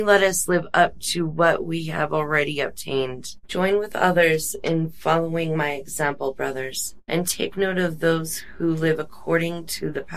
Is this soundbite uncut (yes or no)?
yes